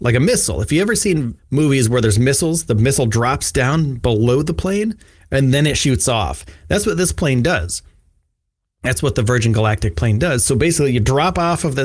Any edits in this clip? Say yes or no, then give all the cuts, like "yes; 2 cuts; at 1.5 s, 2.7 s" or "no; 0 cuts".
yes; 1 cut; at 1.4 s